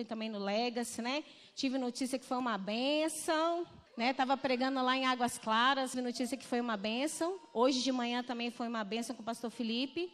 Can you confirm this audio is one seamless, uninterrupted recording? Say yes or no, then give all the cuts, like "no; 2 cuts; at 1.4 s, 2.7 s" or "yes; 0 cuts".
no; 2 cuts; at 3.9 s, 5.9 s